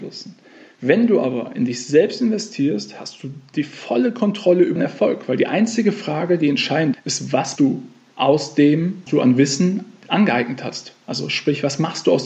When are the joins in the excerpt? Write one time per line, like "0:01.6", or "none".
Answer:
0:04.8
0:06.9
0:07.6
0:09.1